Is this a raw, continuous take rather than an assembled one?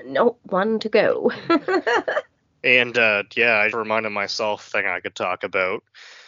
no; 2 cuts; at 3.7 s, 4.7 s

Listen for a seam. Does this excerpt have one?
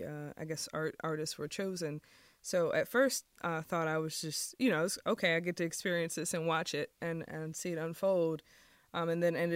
no; 0 cuts

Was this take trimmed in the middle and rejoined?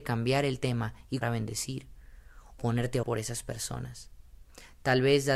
yes; 3 cuts; at 1.2 s, 2.6 s, 3.0 s

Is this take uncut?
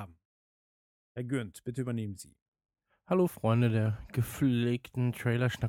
yes; 0 cuts

